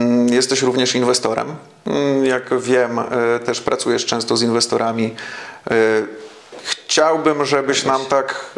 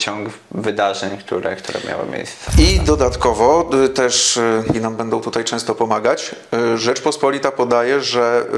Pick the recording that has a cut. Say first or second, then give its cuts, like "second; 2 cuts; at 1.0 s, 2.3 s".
second; 1 cut; at 4.7 s